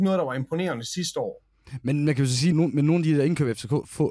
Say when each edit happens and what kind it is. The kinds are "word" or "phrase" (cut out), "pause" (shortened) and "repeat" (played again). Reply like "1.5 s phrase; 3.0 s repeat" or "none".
2.5 s word